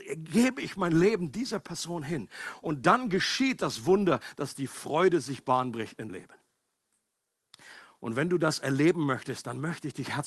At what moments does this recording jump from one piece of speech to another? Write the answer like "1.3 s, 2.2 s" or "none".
6.1 s